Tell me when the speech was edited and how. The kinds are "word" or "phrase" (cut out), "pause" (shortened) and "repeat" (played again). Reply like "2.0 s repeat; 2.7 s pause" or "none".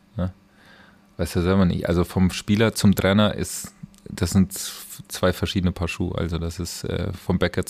none